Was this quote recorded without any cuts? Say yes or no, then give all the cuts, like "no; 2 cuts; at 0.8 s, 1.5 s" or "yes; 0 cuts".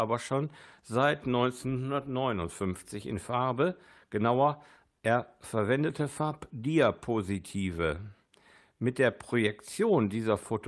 yes; 0 cuts